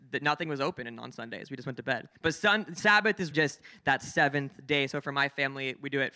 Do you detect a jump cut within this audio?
yes; 2 cuts; at 2.1 s, 3.3 s

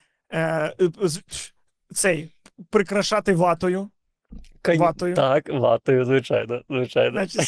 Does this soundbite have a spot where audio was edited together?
no; 0 cuts

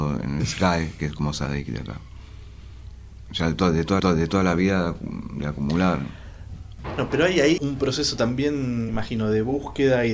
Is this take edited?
yes; 3 cuts; at 4.0 s, 7.6 s, 8.9 s

